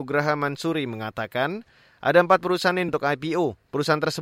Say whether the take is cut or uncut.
cut